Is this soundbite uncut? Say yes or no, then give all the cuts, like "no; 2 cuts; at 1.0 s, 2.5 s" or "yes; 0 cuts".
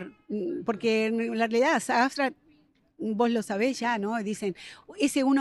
yes; 0 cuts